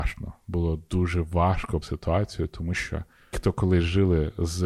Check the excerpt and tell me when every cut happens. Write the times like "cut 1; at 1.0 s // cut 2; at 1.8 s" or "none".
cut 1; at 1.8 s // cut 2; at 3.3 s